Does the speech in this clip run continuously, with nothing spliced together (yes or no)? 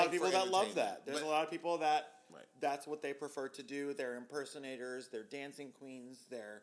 yes